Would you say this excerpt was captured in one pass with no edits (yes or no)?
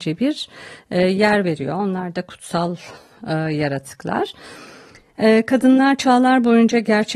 yes